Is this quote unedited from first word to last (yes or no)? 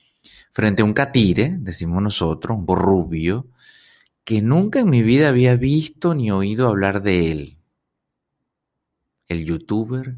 no